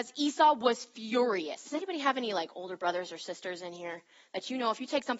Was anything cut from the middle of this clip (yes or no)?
no